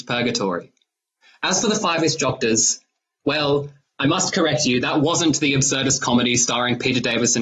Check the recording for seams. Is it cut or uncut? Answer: uncut